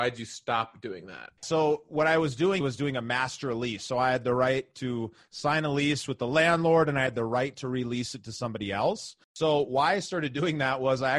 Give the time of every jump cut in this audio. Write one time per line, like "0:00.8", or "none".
0:01.4
0:02.6
0:09.2